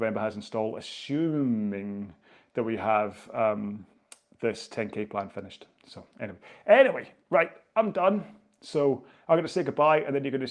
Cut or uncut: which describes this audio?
uncut